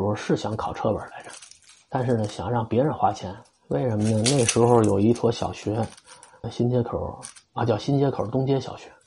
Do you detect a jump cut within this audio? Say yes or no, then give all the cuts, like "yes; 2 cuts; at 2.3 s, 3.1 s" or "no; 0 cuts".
yes; 1 cut; at 6.4 s